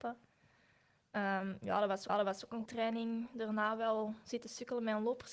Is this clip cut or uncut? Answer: cut